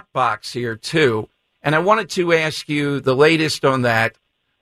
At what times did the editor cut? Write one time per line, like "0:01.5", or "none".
none